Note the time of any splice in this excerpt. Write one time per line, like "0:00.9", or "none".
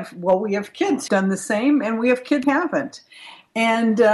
0:01.1
0:02.4

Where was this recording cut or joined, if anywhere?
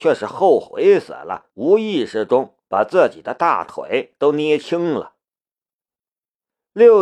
0:01.5
0:02.6

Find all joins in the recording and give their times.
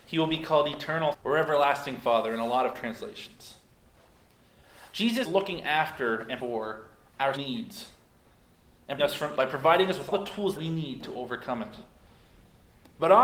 0:01.1
0:05.2
0:06.4
0:07.4
0:09.0
0:09.4
0:10.1
0:10.6

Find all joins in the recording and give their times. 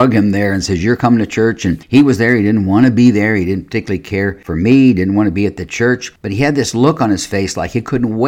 none

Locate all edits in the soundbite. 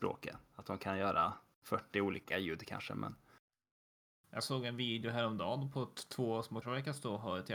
0:06.6

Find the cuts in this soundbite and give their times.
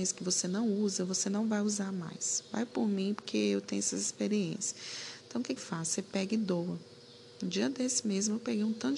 0:05.6

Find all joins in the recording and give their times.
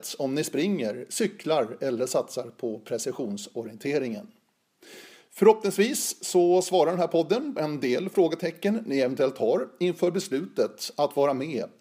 0:07.6

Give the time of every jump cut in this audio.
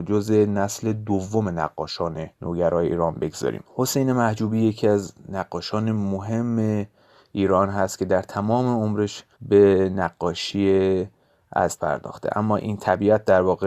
0:02.3
0:03.7
0:09.3
0:11.8

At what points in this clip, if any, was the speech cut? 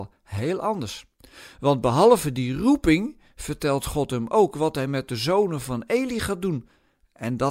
none

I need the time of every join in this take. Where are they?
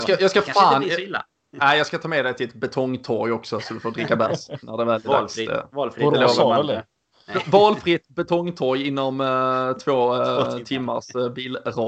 none

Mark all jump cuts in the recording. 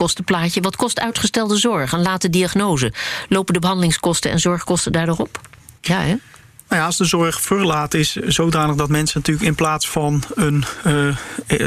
0:05.8

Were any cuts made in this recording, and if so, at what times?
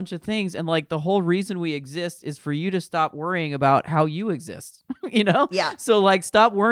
none

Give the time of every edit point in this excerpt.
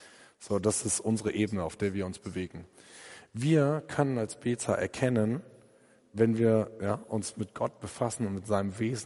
none

